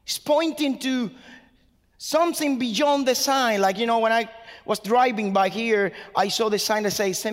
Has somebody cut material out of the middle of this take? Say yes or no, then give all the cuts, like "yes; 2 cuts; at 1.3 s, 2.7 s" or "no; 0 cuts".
no; 0 cuts